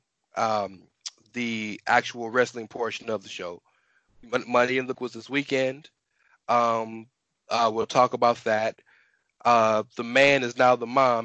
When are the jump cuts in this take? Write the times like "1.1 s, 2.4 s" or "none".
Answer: 4.9 s